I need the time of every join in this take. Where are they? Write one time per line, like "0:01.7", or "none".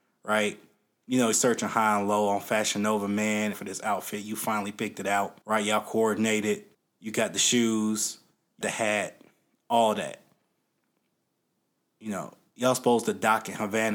0:01.3
0:03.5
0:05.4
0:06.7
0:08.6